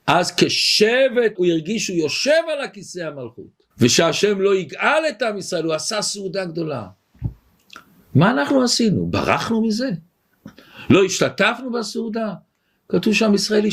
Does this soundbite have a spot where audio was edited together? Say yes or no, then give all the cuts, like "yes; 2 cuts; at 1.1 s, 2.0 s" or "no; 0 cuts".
yes; 2 cuts; at 1.3 s, 3.7 s